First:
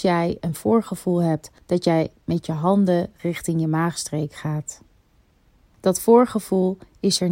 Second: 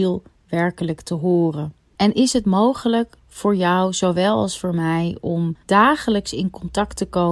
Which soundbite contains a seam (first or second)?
second